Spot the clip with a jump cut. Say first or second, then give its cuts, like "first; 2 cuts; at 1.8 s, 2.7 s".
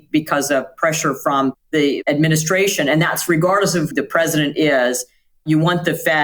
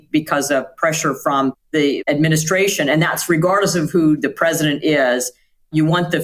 first; 1 cut; at 3.9 s